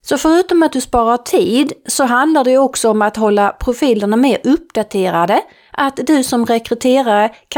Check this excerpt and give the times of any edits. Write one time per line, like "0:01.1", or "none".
none